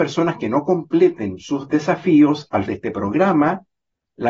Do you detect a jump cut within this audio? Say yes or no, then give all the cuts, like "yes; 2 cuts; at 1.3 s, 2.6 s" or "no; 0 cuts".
yes; 1 cut; at 2.7 s